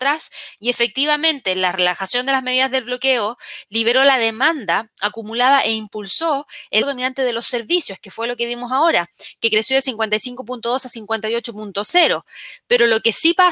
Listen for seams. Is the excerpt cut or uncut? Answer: cut